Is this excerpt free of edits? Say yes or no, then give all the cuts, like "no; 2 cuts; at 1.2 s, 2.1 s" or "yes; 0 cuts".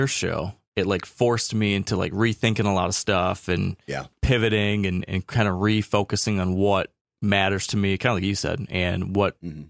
yes; 0 cuts